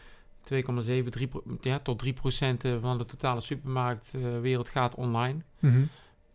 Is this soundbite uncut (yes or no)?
yes